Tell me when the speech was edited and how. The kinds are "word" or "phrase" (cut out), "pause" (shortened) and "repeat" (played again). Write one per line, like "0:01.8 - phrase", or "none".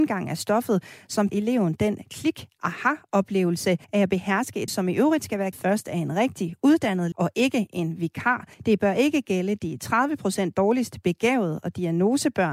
0:01.3 - word
0:03.8 - pause
0:04.7 - word
0:05.5 - word
0:07.1 - word
0:08.5 - pause